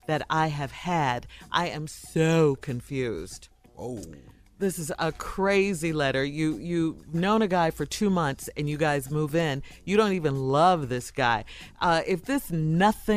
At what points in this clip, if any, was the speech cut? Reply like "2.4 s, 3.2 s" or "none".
none

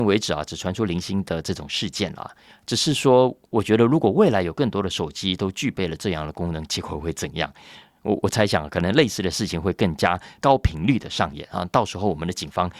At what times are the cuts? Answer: none

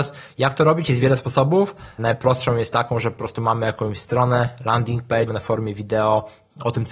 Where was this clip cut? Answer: 5.3 s

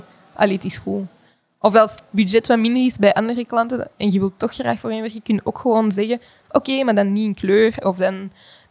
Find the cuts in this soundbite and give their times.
none

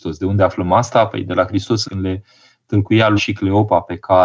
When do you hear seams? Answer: 1.8 s, 3.2 s

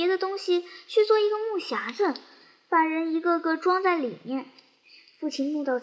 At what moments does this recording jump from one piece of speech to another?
none

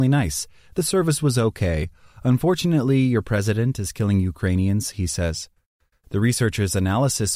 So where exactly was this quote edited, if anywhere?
none

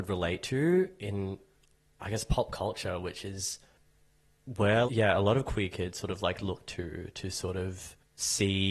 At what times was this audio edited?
4.9 s

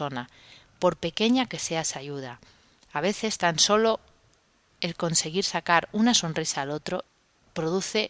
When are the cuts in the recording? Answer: none

